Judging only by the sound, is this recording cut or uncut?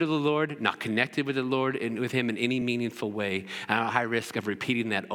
uncut